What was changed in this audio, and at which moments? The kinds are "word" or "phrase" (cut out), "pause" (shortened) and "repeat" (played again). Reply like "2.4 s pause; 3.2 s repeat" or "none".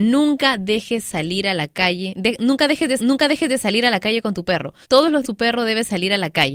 3.0 s repeat; 4.8 s pause; 5.2 s word

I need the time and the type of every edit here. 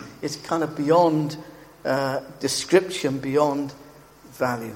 none

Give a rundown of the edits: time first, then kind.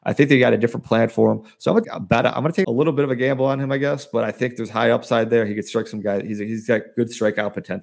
1.8 s word; 2.6 s phrase

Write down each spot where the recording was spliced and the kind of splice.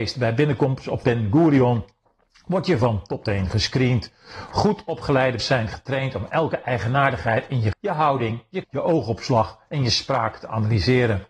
1.0 s word; 3.2 s word; 5.4 s word; 7.7 s word; 8.6 s word

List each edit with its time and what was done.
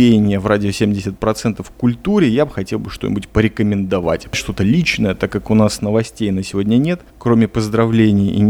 7.1 s pause

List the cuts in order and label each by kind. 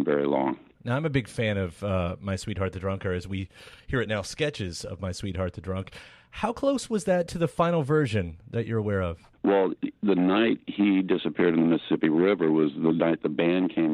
none

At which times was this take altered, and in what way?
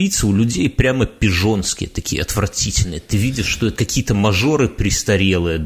3.7 s word

